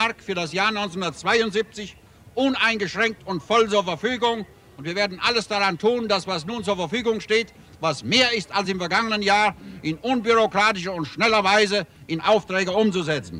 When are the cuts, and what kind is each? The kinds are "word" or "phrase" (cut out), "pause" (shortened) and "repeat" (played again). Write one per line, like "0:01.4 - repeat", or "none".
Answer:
none